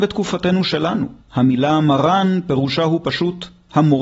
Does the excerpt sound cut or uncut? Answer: cut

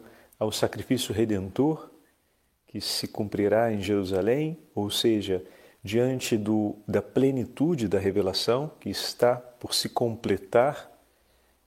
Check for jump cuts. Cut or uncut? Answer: uncut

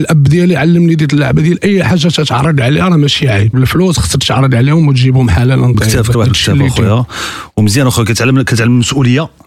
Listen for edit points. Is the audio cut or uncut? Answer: cut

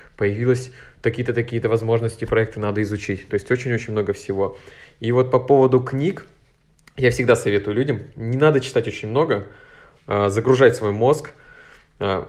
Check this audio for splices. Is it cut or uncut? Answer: uncut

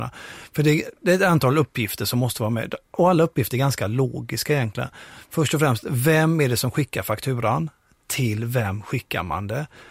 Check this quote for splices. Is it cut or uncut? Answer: uncut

